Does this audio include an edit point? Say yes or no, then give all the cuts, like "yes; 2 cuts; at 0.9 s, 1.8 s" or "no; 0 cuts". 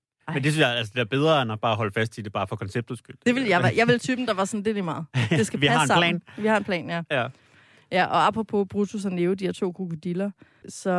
no; 0 cuts